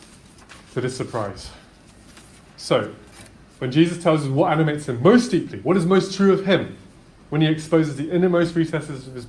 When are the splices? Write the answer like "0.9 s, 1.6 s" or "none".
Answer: 2.5 s, 7.1 s